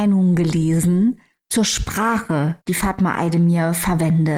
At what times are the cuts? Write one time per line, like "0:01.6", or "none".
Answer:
0:02.6